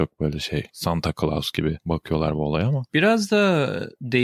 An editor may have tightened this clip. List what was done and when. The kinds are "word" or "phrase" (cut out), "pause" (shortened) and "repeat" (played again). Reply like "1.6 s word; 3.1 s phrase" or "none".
none